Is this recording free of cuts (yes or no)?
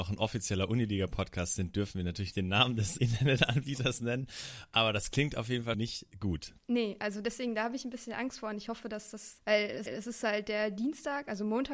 no